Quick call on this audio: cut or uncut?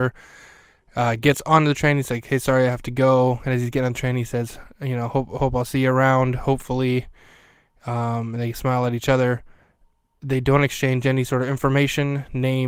uncut